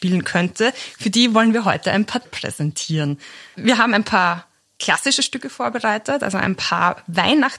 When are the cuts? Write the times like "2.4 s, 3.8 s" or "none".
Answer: 2.2 s